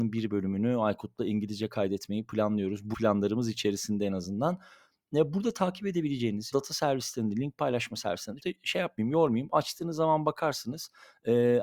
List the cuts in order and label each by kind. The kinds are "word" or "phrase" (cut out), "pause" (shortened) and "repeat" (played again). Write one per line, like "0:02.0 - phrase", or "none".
0:02.9 - word
0:06.5 - word
0:08.4 - word